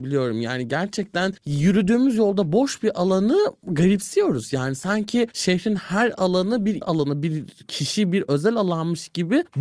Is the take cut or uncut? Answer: cut